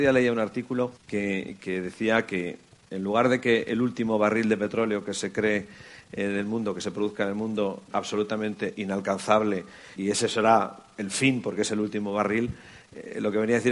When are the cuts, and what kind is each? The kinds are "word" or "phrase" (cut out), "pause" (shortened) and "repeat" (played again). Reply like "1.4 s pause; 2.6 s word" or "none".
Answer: 1.0 s pause; 7.9 s phrase; 10.0 s word